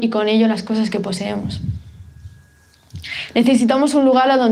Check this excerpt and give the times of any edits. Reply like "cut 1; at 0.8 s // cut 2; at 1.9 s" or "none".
none